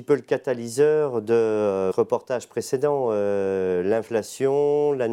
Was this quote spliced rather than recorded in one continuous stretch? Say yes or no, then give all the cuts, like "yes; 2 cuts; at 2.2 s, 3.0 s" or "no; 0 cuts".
yes; 1 cut; at 1.9 s